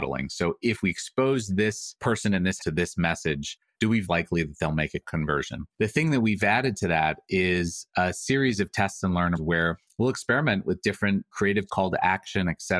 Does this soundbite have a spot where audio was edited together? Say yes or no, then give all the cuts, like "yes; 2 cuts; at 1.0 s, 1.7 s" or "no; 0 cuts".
yes; 5 cuts; at 2.6 s, 4.1 s, 5.7 s, 9.4 s, 11.7 s